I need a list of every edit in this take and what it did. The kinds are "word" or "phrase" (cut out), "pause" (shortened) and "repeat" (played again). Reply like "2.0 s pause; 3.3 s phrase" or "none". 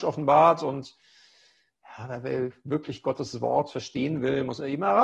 none